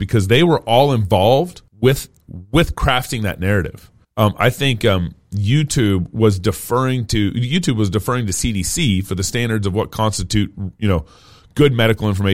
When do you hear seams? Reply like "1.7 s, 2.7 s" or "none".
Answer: 1.7 s, 4.0 s

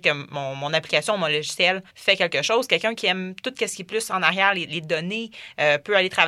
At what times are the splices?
1.9 s

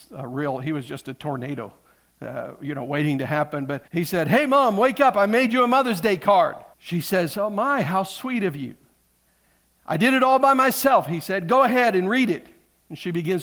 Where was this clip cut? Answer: 3.9 s, 6.7 s

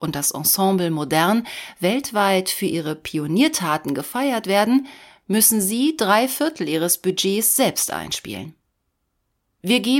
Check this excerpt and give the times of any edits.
none

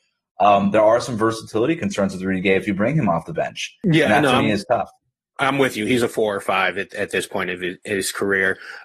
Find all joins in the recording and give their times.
none

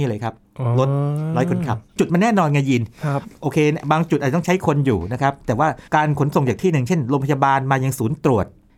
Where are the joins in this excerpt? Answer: 1.9 s, 5.9 s

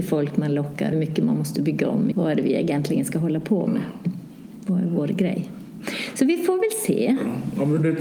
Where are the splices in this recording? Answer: 0.9 s, 2.1 s

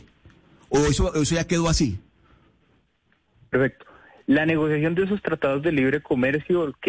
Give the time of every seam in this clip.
none

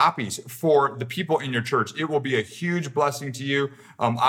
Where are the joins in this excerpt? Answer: none

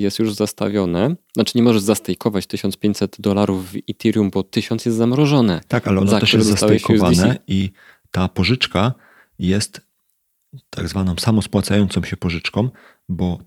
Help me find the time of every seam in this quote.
none

